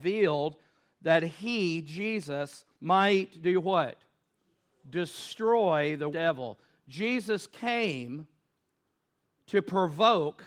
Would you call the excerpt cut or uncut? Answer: cut